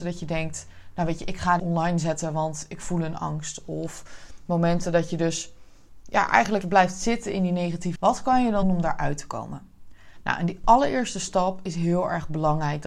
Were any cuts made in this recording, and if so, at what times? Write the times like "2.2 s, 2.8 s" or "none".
1.6 s, 6.6 s, 8.0 s, 8.6 s